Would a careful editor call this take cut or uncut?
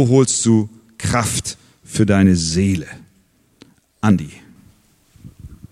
uncut